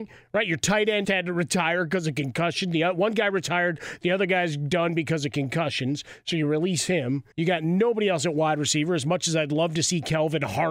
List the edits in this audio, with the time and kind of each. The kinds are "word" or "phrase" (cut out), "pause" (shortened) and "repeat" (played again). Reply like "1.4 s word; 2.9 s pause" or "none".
1.0 s word; 7.3 s pause